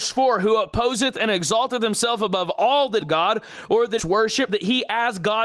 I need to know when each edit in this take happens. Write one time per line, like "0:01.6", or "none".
0:03.0
0:04.0
0:04.5